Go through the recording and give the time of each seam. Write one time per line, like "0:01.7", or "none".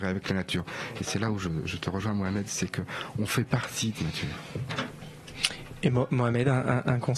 0:03.9